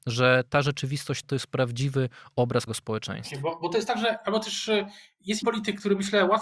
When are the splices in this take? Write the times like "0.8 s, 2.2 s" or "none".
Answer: 1.2 s, 2.7 s, 5.4 s